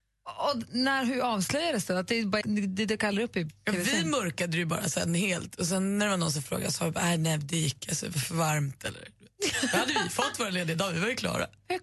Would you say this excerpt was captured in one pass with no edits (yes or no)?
no